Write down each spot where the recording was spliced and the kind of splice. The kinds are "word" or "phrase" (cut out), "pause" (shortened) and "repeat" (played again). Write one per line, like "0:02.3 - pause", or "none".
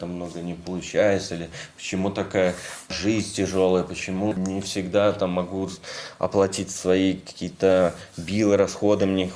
none